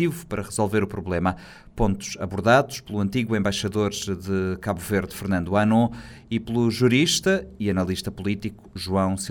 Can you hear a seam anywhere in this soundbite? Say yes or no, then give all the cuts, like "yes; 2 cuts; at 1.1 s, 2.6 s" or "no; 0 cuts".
no; 0 cuts